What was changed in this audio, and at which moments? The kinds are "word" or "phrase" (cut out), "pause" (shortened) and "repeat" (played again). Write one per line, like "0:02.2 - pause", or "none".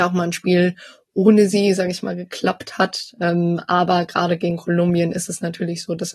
none